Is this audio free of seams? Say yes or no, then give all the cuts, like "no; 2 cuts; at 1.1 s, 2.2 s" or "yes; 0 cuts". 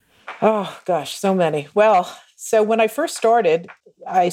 yes; 0 cuts